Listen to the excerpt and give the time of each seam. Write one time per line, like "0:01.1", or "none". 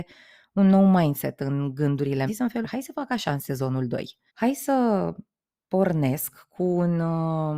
0:02.3
0:02.6
0:04.3